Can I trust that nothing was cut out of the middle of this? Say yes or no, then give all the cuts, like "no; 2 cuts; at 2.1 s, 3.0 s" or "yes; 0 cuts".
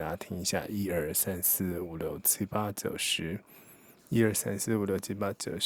yes; 0 cuts